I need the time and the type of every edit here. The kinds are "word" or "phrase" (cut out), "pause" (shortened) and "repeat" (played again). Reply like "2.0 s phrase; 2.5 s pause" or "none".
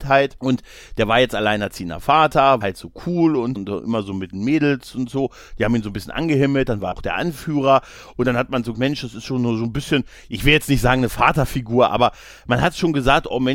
2.6 s word; 3.6 s word; 6.9 s word; 8.7 s word

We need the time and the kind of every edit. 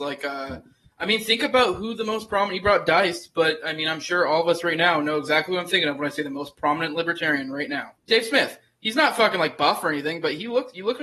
8.0 s pause

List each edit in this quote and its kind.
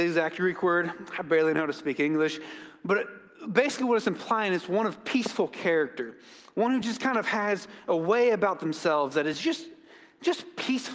none

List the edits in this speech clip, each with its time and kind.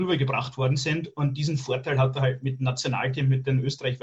none

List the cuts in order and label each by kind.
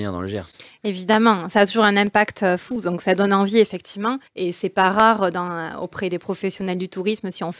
4.3 s pause

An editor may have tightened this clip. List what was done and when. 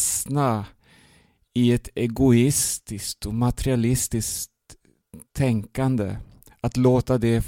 none

